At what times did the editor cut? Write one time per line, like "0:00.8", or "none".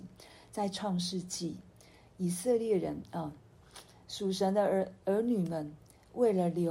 none

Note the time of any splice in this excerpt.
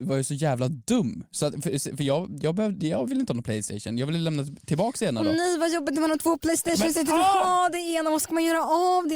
none

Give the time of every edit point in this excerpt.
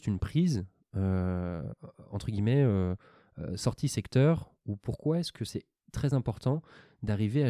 none

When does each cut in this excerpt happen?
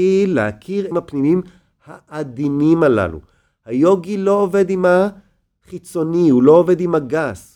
0:00.9

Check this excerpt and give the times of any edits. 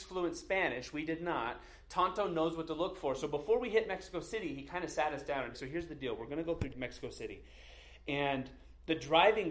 0:05.5
0:06.7

